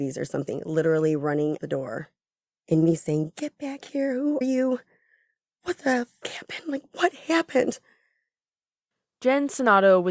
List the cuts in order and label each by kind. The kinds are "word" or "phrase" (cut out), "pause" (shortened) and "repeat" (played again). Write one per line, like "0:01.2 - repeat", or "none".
0:01.6 - word
0:04.4 - word
0:06.2 - word